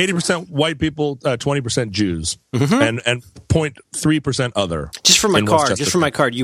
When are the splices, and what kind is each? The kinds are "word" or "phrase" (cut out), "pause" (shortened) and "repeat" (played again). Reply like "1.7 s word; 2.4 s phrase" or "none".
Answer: none